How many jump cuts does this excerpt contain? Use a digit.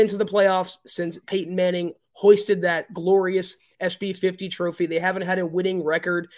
0